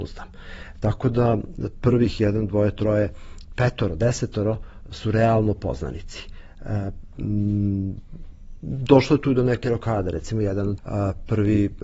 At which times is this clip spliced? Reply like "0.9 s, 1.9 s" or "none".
10.8 s